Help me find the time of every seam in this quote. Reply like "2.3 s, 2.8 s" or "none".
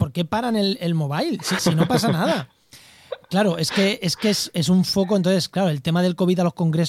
1.6 s